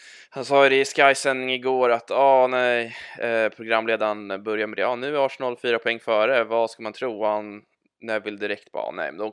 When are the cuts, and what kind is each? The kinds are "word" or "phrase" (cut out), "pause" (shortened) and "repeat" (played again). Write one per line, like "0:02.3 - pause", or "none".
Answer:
none